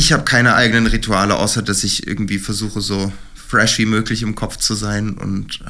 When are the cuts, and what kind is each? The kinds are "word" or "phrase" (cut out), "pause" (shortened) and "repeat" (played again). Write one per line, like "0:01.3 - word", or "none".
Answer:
none